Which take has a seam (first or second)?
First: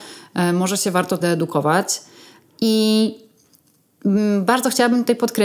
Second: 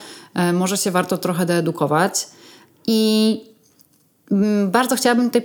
first